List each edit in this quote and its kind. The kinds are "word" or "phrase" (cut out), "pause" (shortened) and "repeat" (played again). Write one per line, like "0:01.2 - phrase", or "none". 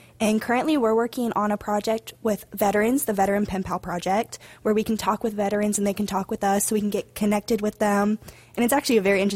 none